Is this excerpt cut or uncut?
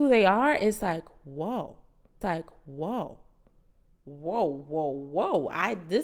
cut